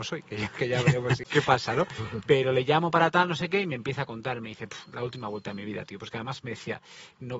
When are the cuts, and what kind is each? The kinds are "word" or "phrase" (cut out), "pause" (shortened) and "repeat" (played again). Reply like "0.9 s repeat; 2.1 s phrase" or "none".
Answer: 1.2 s word

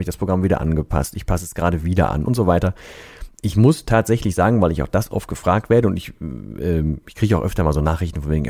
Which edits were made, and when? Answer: none

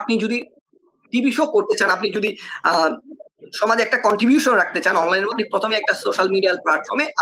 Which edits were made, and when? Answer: 5.3 s word

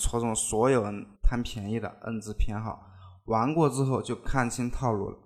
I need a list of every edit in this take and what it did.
1.1 s pause

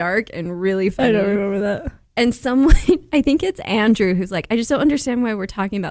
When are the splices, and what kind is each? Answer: none

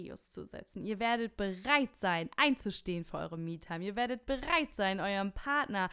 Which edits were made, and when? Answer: none

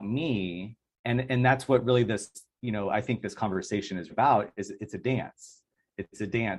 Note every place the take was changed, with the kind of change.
0.9 s pause; 4.1 s word

